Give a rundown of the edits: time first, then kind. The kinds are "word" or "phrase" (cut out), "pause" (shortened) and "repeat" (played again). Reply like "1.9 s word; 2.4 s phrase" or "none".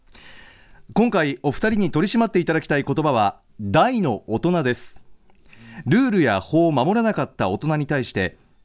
3.5 s pause